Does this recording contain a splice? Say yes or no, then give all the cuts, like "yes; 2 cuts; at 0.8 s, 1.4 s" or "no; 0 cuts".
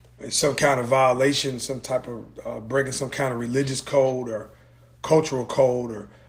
no; 0 cuts